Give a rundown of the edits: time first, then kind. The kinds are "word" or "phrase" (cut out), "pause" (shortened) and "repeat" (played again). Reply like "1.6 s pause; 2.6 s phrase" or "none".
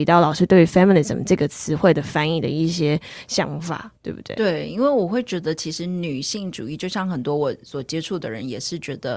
3.9 s pause